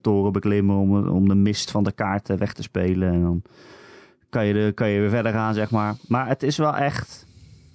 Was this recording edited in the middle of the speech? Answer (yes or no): no